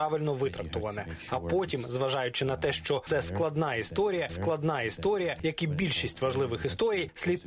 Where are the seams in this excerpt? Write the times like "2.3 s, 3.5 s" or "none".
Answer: 4.3 s